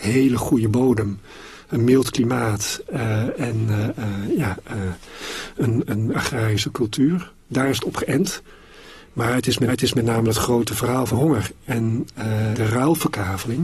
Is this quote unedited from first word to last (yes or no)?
no